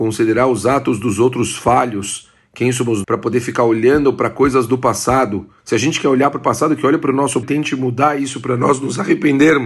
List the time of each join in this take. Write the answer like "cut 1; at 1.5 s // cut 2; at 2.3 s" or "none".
cut 1; at 3.0 s // cut 2; at 5.6 s // cut 3; at 7.4 s